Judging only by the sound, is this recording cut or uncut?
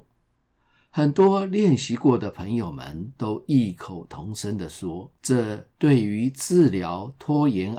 cut